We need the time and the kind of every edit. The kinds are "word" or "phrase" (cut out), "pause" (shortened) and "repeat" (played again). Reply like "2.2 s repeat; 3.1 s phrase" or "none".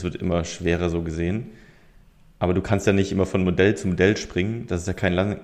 none